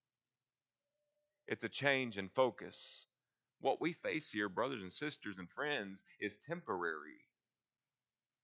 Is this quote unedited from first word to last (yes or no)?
yes